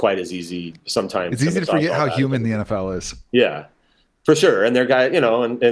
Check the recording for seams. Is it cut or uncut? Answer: uncut